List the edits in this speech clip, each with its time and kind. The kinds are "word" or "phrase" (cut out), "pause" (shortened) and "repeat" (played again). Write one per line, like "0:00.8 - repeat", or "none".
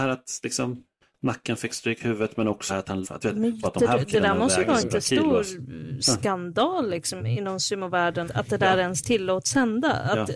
0:02.7 - word
0:03.0 - word
0:03.6 - word
0:04.8 - word
0:07.2 - word
0:08.2 - word

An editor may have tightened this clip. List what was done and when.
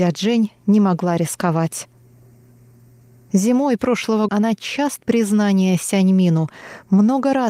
0:04.3 - word
0:05.0 - word

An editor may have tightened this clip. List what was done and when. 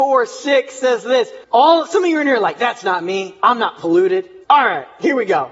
0:01.4 - pause
0:04.4 - pause

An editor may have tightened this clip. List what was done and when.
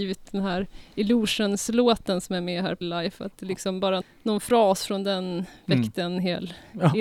0:02.8 - word
0:04.0 - word

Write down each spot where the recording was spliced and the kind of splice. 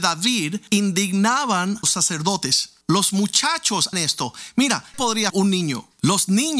0:01.8 - word
0:02.8 - pause
0:03.9 - word
0:04.9 - word
0:05.3 - word

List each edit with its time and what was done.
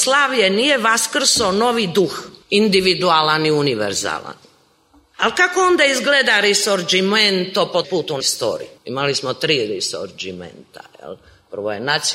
0:02.4 - pause
0:07.8 - word
0:08.2 - word
0:08.8 - pause

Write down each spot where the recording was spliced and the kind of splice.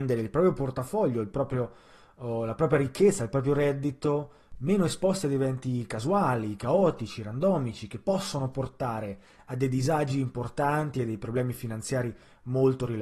none

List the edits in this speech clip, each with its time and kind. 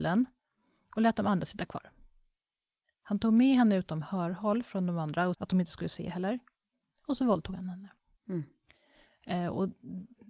0:05.3 - word
0:08.2 - pause

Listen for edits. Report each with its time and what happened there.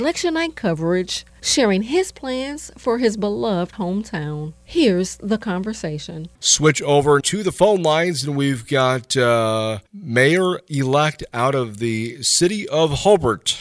0:06.3 - pause
0:07.2 - word
0:09.9 - pause

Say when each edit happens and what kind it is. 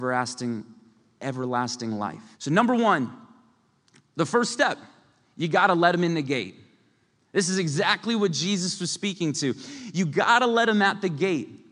0:02.3 - pause

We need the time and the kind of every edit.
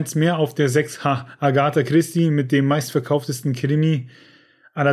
none

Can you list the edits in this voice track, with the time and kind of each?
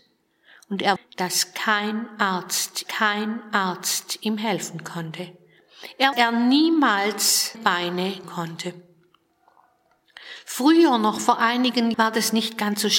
0:01.0 - word
0:02.9 - repeat
0:06.1 - phrase
0:07.5 - word
0:08.2 - word
0:11.9 - word

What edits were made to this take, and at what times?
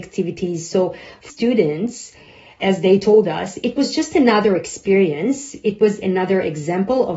0:01.3 - word
0:02.6 - word
0:06.0 - word

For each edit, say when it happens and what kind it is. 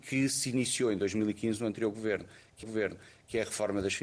0:02.6 - repeat

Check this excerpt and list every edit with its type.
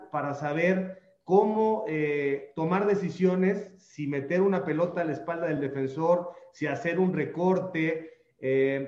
none

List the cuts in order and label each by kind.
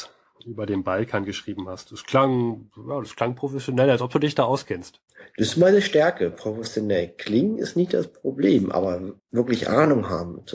0:09.2 - pause

